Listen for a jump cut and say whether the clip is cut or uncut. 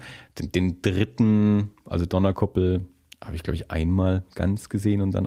cut